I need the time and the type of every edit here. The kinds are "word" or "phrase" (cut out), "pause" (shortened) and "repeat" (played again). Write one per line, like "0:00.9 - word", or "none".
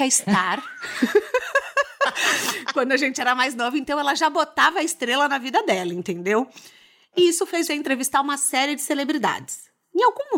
0:07.7 - word